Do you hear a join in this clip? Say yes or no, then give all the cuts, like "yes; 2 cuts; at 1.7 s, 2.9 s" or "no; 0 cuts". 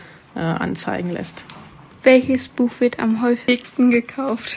no; 0 cuts